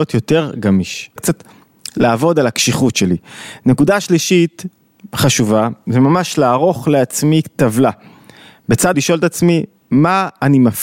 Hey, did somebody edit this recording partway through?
yes; 2 cuts; at 1.2 s, 8.9 s

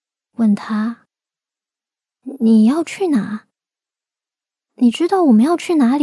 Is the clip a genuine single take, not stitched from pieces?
yes; 0 cuts

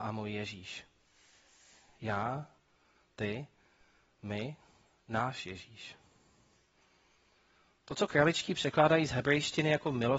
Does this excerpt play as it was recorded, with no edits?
yes; 0 cuts

